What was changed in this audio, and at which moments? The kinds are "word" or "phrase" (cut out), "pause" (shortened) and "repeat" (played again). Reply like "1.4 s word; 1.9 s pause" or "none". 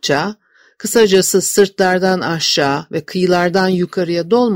none